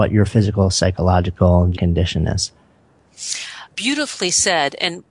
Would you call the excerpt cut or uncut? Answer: cut